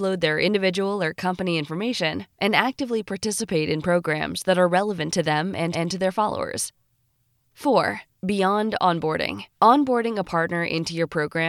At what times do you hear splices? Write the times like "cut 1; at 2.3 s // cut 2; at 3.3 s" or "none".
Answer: cut 1; at 2.3 s // cut 2; at 5.7 s // cut 3; at 8.2 s // cut 4; at 9.5 s